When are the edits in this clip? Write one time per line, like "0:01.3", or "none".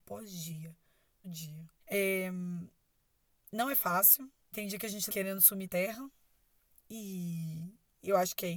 0:01.2
0:01.7
0:04.5
0:05.1
0:05.6